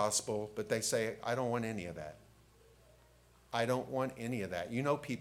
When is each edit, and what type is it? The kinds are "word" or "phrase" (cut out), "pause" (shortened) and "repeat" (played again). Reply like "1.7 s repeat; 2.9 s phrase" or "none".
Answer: none